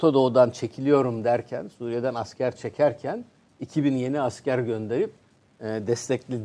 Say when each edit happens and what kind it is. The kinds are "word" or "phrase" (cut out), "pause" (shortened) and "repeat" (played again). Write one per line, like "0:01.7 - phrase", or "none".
none